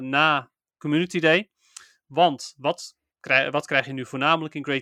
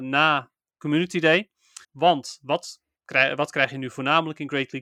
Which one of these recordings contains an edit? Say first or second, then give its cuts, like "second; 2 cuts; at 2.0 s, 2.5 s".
second; 1 cut; at 1.8 s